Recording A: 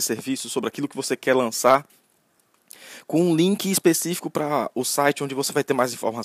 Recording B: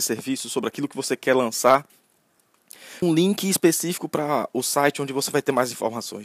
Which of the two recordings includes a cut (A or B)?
B